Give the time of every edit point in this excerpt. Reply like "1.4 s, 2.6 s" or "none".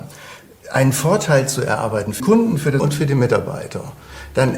2.2 s, 2.8 s